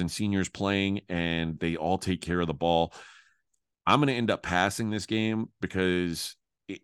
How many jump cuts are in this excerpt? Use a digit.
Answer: 0